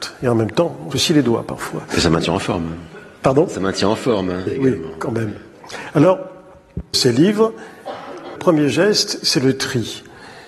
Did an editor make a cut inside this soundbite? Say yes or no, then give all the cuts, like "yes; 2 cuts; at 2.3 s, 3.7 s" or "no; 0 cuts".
yes; 4 cuts; at 0.9 s, 4.5 s, 6.9 s, 8.4 s